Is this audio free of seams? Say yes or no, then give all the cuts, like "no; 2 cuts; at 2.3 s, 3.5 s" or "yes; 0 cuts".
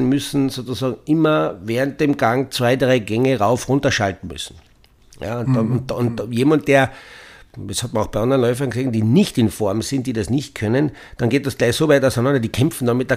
yes; 0 cuts